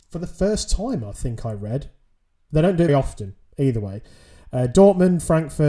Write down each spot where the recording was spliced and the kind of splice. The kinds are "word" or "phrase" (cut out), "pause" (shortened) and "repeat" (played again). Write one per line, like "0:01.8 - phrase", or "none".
0:02.9 - word